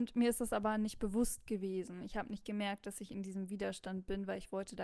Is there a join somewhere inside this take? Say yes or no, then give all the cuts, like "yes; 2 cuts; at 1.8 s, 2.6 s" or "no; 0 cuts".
no; 0 cuts